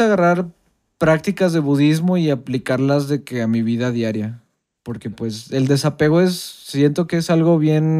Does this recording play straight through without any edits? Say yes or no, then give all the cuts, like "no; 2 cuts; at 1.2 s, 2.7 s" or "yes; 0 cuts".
yes; 0 cuts